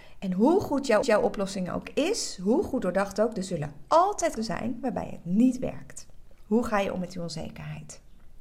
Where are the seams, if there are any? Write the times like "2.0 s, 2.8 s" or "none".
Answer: 1.0 s, 4.4 s